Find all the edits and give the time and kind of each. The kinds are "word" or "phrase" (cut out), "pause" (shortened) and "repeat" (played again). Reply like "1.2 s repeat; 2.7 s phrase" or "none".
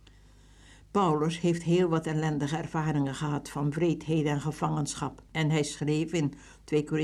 5.3 s pause